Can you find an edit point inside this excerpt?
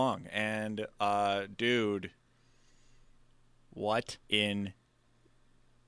yes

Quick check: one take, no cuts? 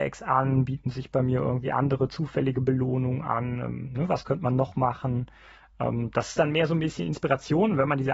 yes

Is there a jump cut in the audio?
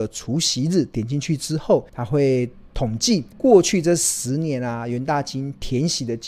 yes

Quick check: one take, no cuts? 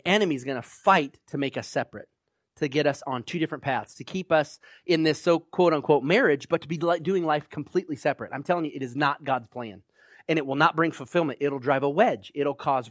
yes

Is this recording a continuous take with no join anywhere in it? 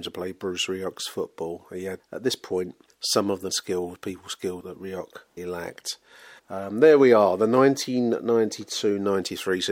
no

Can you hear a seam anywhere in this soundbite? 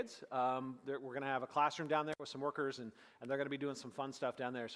no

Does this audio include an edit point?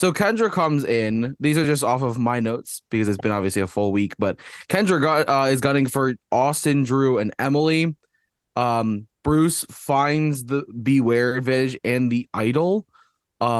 no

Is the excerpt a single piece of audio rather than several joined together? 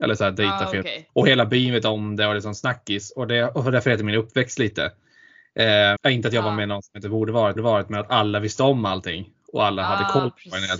no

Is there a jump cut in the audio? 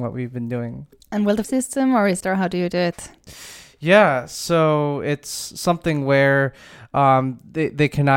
yes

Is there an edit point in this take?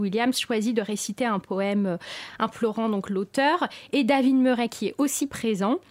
no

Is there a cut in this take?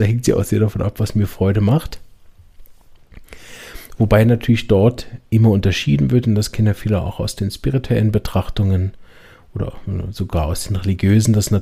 no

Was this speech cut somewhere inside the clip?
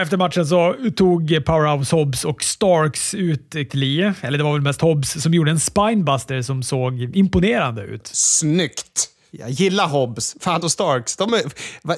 yes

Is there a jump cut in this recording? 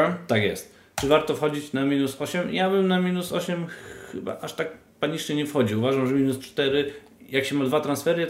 no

